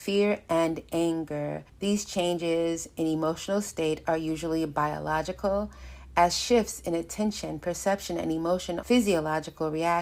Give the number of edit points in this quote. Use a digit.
2